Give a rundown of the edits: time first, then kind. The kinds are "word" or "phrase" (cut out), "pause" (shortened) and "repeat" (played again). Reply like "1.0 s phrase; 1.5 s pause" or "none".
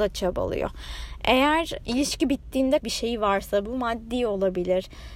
1.8 s word; 2.8 s word